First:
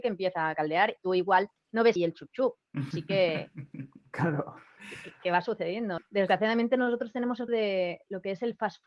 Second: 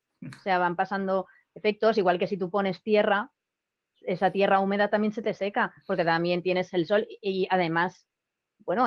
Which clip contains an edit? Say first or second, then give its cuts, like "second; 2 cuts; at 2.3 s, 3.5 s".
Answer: first; 5 cuts; at 1.0 s, 2.0 s, 2.9 s, 6.0 s, 7.5 s